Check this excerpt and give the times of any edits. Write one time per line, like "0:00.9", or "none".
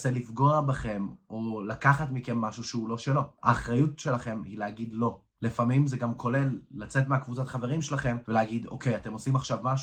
none